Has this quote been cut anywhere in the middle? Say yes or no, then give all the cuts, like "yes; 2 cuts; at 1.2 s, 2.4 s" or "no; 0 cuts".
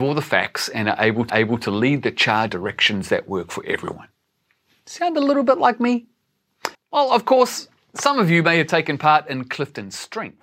yes; 3 cuts; at 1.3 s, 2.5 s, 6.7 s